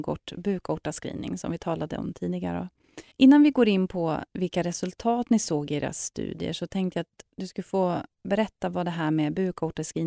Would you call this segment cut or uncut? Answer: cut